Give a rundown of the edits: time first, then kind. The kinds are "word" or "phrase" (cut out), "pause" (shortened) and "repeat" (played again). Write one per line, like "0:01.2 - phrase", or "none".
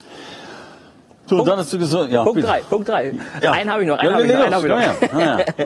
none